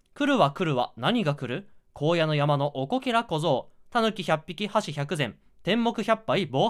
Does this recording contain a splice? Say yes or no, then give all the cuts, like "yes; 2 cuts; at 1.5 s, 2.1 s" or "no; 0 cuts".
no; 0 cuts